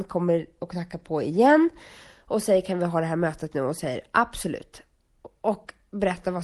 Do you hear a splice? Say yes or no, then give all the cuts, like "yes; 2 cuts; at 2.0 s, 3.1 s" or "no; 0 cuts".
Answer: no; 0 cuts